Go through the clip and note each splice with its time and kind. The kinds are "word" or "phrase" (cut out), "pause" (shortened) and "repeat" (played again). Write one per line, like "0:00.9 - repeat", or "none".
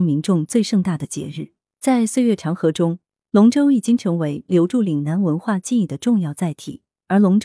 none